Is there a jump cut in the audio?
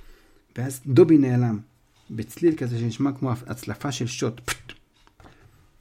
no; 0 cuts

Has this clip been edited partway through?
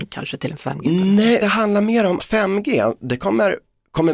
yes; 2 cuts; at 1.4 s, 2.2 s

